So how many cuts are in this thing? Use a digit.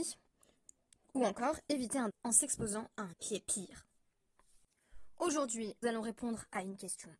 3